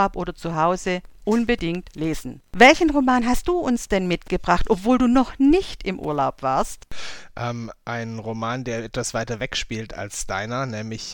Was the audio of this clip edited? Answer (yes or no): no